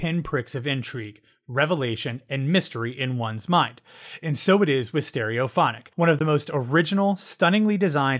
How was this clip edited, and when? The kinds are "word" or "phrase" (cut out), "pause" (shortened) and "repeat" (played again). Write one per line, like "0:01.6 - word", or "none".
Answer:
0:05.9 - pause